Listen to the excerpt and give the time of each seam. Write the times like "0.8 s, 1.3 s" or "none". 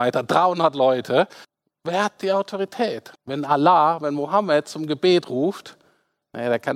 1.4 s, 3.1 s

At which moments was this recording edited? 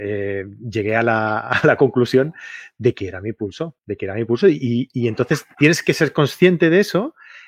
3.8 s

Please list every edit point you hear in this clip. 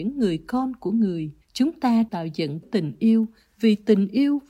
1.4 s, 2.1 s, 2.6 s

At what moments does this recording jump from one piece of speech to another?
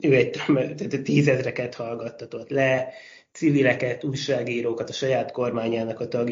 none

